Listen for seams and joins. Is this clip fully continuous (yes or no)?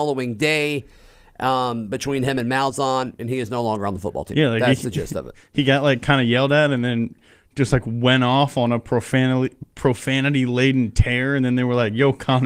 yes